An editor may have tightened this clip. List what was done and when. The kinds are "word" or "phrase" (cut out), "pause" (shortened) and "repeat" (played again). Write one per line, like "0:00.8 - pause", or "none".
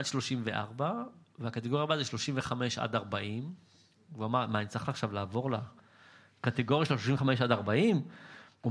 none